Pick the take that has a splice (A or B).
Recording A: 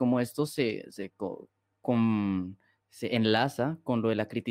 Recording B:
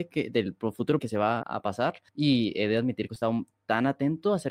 B